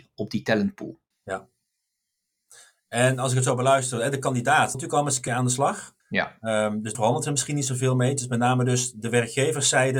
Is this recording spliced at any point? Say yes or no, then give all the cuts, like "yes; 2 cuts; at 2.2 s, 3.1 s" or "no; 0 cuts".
yes; 5 cuts; at 1.1 s, 4.7 s, 5.3 s, 6.0 s, 6.9 s